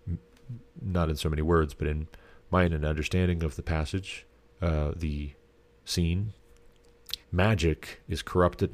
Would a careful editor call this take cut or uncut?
cut